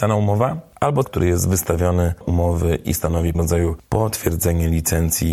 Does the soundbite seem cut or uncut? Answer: cut